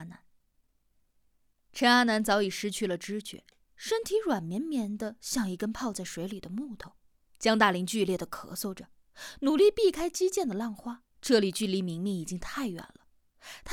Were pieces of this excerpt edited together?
yes; 2 cuts; at 7.3 s, 11.1 s

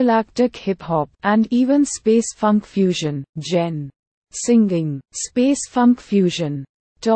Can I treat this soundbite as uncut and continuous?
no; 3 cuts; at 1.1 s, 3.3 s, 5.0 s

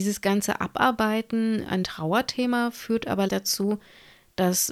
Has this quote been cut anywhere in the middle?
yes; 2 cuts; at 1.8 s, 3.3 s

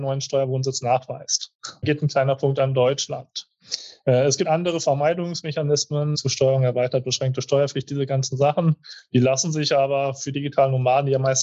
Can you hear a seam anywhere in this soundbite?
yes; 4 cuts; at 1.8 s, 4.4 s, 6.1 s, 10.3 s

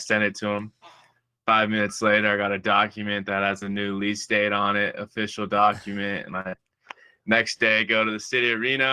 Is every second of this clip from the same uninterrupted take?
yes; 0 cuts

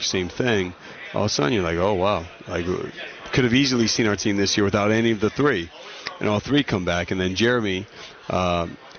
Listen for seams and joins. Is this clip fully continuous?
yes; 0 cuts

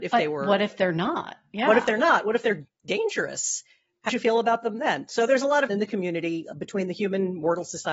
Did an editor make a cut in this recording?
yes; 2 cuts; at 4.1 s, 5.7 s

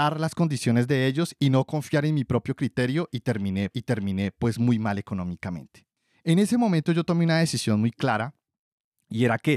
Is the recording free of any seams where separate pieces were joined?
no; 1 cut; at 3.7 s

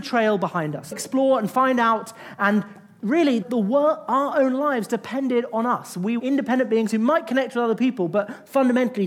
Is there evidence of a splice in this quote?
yes; 3 cuts; at 0.9 s, 3.4 s, 6.2 s

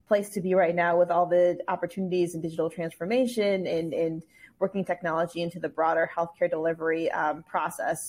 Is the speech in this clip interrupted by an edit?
no; 0 cuts

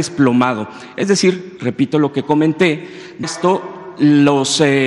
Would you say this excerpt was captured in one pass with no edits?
no; 2 cuts; at 1.6 s, 3.2 s

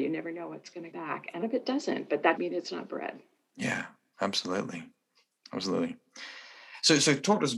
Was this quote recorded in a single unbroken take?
no; 3 cuts; at 0.9 s, 1.4 s, 2.4 s

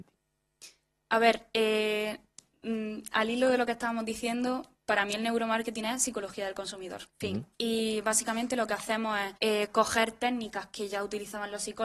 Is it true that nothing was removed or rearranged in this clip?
no; 3 cuts; at 7.1 s, 7.5 s, 9.4 s

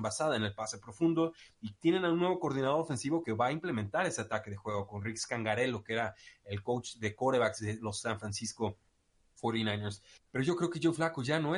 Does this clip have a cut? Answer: no; 0 cuts

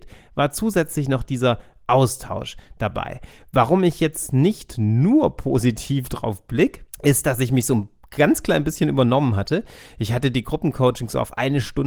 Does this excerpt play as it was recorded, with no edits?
yes; 0 cuts

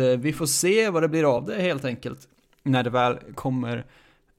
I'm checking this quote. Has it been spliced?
no; 0 cuts

